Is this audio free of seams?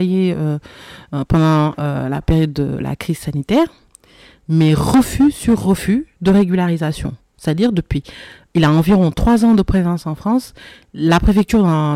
yes; 0 cuts

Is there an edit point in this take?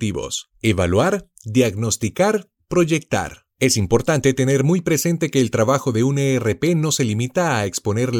no; 0 cuts

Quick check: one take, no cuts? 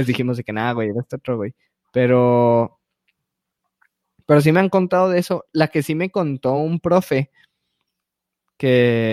yes; 0 cuts

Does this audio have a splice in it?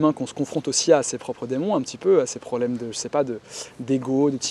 no; 0 cuts

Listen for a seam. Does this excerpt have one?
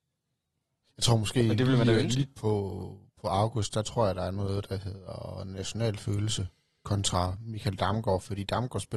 no; 0 cuts

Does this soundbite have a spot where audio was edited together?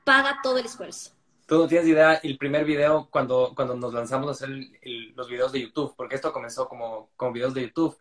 no; 0 cuts

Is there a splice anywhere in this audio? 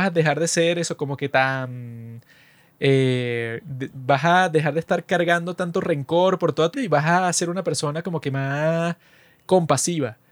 yes; 1 cut; at 6.7 s

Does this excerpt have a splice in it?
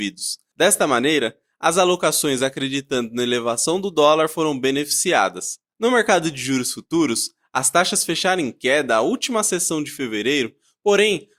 no; 0 cuts

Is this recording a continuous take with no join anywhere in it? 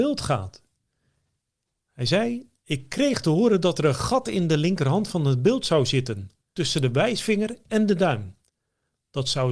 yes; 0 cuts

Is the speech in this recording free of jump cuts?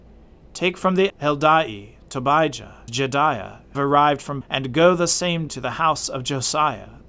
no; 5 cuts; at 1.1 s, 2.9 s, 3.7 s, 4.4 s, 5.5 s

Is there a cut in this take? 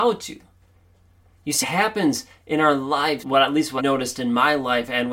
yes; 3 cuts; at 1.6 s, 3.2 s, 3.8 s

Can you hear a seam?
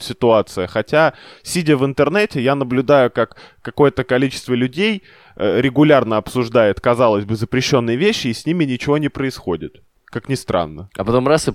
no; 0 cuts

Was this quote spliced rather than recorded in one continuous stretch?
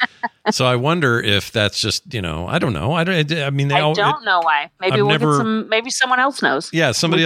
no; 0 cuts

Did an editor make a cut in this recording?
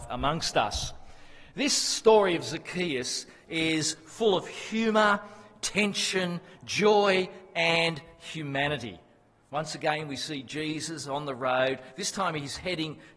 no; 0 cuts

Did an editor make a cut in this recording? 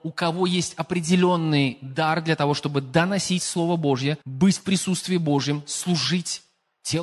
yes; 1 cut; at 4.2 s

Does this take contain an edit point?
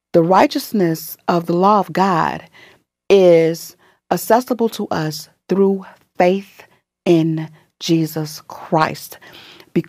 no; 0 cuts

